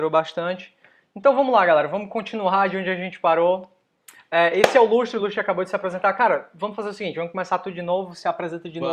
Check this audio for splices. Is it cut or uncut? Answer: uncut